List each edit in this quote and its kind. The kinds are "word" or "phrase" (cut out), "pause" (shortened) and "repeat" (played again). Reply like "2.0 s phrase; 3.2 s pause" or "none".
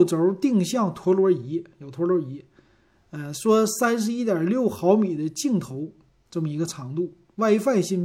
none